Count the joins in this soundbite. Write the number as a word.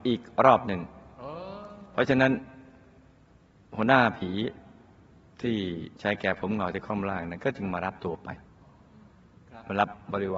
one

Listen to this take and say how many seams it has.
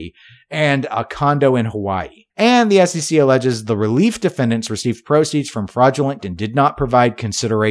two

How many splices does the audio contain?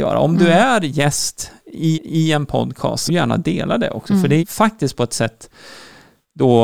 three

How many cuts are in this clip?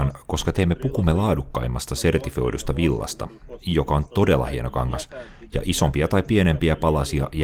one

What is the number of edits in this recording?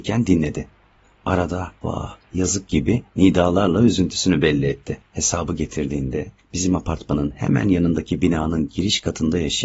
two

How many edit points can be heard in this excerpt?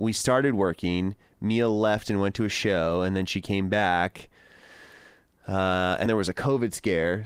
one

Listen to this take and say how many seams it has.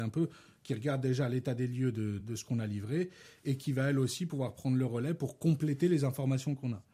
one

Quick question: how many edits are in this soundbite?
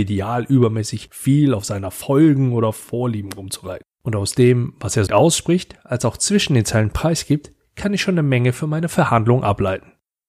two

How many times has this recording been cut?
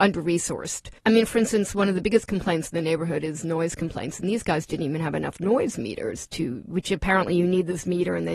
one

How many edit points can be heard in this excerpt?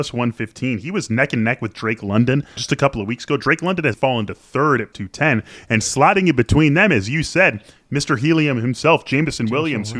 three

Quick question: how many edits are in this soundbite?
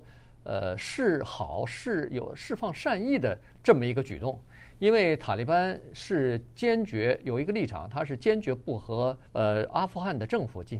one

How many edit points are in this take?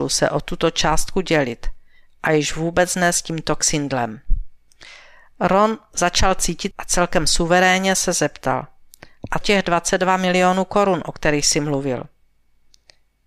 two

